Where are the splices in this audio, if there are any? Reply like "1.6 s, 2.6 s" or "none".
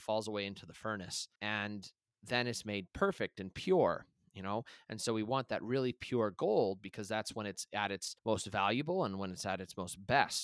1.4 s, 8.2 s